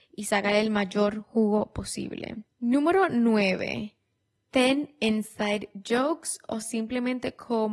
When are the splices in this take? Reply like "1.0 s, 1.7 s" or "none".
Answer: 2.5 s